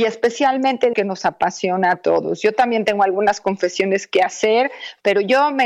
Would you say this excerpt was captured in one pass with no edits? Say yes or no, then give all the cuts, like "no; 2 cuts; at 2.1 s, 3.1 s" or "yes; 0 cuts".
no; 1 cut; at 0.9 s